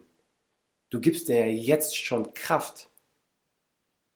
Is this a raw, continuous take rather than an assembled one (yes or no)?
yes